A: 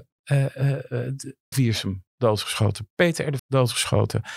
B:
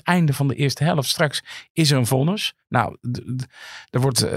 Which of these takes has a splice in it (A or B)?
A